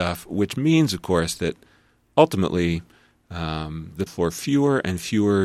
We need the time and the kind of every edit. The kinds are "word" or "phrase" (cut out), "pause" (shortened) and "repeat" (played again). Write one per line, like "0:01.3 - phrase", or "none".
0:04.1 - word

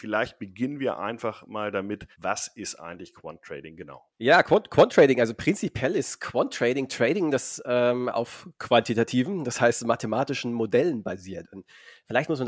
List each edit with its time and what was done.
0:02.1 - pause
0:04.1 - pause

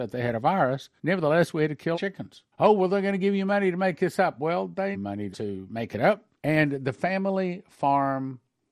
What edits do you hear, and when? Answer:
0:01.0 - pause
0:01.9 - phrase
0:02.5 - pause
0:04.9 - phrase
0:05.3 - word
0:06.4 - pause

